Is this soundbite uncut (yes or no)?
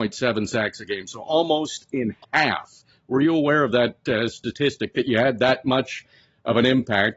yes